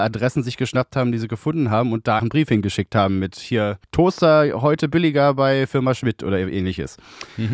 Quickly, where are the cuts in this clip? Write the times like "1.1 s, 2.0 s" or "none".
2.2 s, 3.8 s